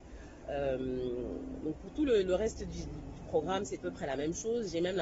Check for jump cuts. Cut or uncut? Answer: cut